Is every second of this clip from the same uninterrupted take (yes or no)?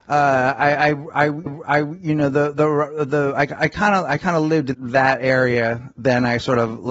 no